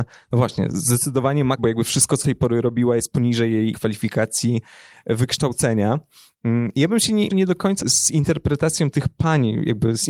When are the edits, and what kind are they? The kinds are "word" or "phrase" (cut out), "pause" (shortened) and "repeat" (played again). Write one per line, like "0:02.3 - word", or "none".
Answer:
0:01.6 - word
0:02.2 - word
0:03.7 - word
0:07.3 - word
0:07.8 - word